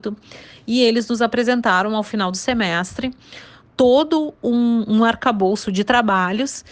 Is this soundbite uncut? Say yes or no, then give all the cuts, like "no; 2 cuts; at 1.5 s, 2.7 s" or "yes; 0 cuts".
yes; 0 cuts